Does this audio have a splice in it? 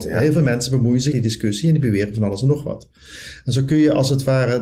yes; 1 cut; at 1.1 s

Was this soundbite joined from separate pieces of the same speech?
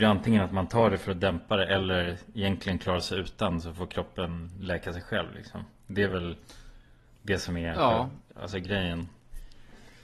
no; 0 cuts

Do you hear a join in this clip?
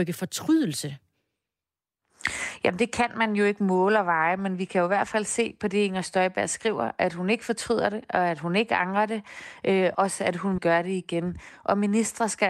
yes; 2 cuts; at 9.9 s, 10.6 s

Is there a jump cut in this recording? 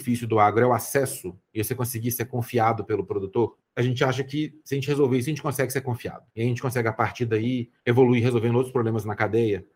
yes; 3 cuts; at 3.7 s, 6.3 s, 7.8 s

